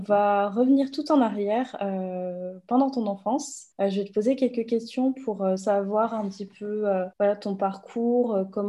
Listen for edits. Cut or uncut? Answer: cut